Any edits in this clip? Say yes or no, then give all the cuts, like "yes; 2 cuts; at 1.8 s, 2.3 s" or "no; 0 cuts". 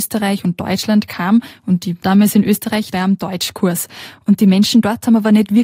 yes; 2 cuts; at 2.0 s, 2.9 s